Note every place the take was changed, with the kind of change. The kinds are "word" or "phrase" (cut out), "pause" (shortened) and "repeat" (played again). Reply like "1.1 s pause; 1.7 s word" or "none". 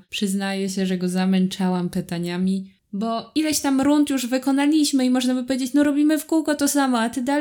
none